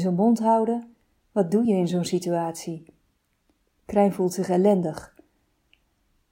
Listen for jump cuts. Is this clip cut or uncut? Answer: uncut